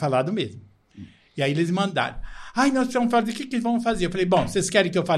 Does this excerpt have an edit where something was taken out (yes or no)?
no